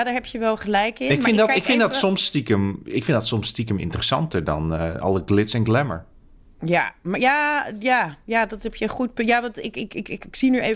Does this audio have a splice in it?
no; 0 cuts

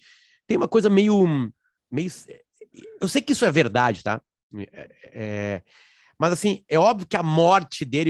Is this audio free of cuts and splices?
yes; 0 cuts

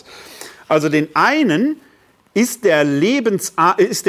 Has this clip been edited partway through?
no; 0 cuts

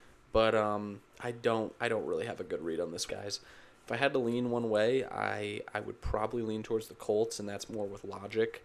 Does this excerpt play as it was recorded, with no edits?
no; 2 cuts; at 1.1 s, 3.1 s

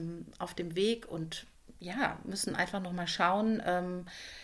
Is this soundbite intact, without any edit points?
yes; 0 cuts

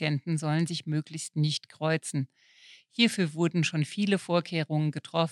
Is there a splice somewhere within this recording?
no; 0 cuts

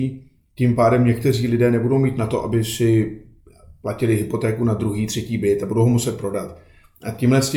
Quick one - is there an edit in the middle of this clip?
no; 0 cuts

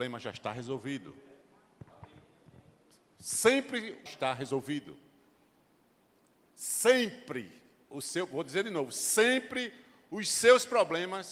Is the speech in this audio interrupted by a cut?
yes; 1 cut; at 4.1 s

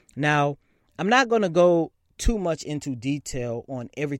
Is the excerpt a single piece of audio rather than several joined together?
yes; 0 cuts

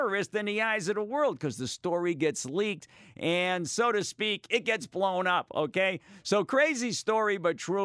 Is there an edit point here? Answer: no; 0 cuts

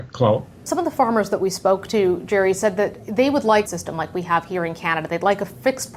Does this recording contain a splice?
yes; 1 cut; at 3.6 s

